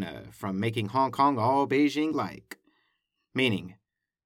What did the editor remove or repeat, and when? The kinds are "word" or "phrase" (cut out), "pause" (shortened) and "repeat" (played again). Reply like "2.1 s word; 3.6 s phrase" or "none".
none